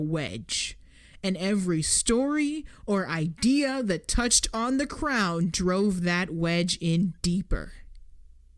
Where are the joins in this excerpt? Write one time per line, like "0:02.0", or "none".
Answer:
none

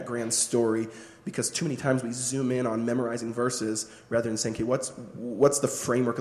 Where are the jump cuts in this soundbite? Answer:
none

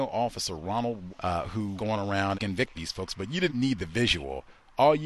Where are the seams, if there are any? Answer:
0:01.1
0:01.8
0:02.3
0:02.7
0:03.5

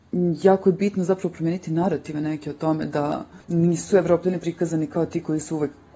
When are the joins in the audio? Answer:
0:03.4

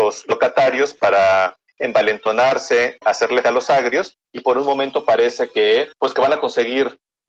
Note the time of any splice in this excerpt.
0:03.0
0:03.4
0:05.9

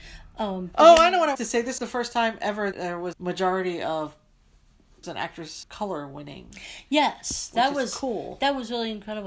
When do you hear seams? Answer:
0:01.3
0:01.8
0:02.7
0:03.1
0:05.0
0:05.6

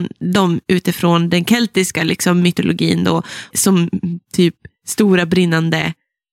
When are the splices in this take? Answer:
0:03.5

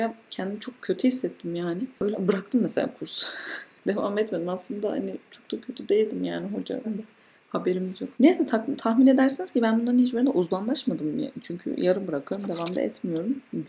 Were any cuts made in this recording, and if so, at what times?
0:02.1
0:06.8
0:08.1

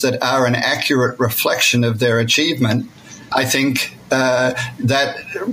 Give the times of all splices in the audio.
0:03.3

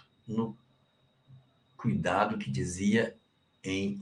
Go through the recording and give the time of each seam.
none

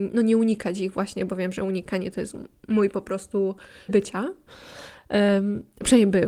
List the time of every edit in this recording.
0:03.9

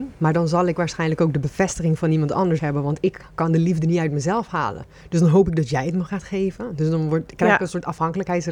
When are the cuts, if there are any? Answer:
0:02.6

